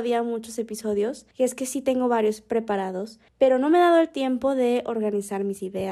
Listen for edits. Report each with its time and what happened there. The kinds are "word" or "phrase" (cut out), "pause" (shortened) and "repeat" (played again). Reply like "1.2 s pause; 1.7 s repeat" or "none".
1.3 s pause; 3.3 s pause